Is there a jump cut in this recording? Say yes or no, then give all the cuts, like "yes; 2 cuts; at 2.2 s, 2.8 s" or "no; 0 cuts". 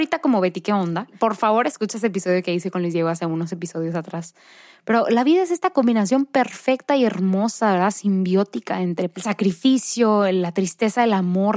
no; 0 cuts